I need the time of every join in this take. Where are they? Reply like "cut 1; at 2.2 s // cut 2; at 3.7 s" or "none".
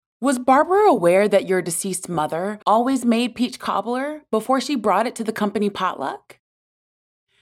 cut 1; at 2.6 s